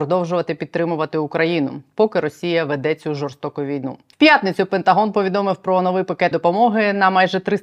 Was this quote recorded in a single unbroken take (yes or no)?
no